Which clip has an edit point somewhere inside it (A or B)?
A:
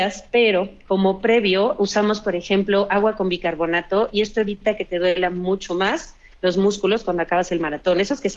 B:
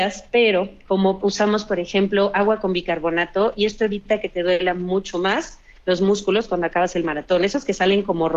B